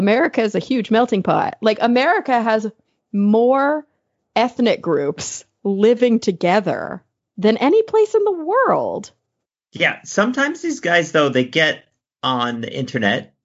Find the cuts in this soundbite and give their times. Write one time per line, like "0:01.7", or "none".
none